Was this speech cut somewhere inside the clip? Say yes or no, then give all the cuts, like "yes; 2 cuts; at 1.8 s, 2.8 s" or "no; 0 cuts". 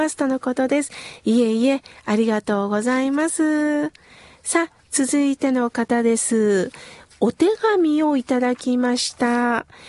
no; 0 cuts